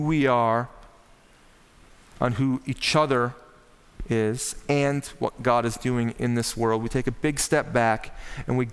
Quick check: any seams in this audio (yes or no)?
no